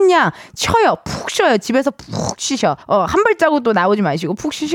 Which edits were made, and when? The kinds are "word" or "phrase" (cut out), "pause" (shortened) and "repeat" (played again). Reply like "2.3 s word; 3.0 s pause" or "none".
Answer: 2.8 s pause